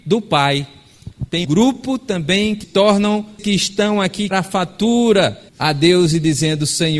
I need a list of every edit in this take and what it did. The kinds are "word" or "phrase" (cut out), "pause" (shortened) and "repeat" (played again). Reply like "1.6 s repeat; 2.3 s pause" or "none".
1.4 s word; 2.6 s word; 3.4 s word; 4.3 s phrase; 5.5 s pause